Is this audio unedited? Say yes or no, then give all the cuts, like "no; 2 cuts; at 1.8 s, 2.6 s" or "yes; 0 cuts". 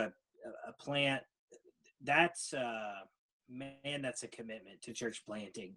yes; 0 cuts